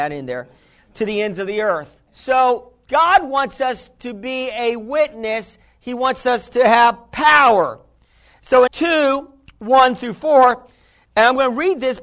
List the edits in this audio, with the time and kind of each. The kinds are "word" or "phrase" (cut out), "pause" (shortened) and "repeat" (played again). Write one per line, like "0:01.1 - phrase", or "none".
0:02.1 - pause
0:08.7 - phrase